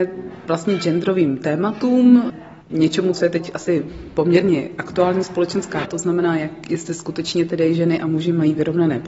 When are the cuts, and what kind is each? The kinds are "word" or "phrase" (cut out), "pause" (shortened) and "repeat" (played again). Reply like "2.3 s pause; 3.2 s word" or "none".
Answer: 2.6 s pause; 5.8 s word